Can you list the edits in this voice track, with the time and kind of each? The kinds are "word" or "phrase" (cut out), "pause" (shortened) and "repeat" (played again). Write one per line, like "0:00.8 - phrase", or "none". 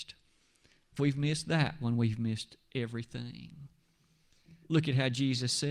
0:01.0 - word
0:04.6 - pause